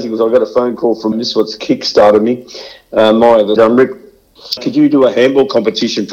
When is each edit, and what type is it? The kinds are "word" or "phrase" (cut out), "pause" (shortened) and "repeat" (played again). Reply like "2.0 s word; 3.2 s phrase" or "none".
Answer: 1.1 s word; 3.6 s phrase; 4.6 s word